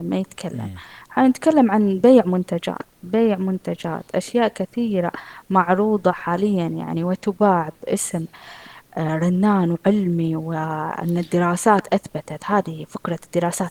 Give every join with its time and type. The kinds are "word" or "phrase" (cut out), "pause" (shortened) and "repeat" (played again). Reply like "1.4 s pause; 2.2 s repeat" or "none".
none